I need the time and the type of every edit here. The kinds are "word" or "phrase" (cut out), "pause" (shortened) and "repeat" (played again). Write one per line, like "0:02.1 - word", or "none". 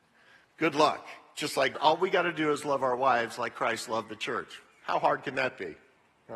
0:01.7 - word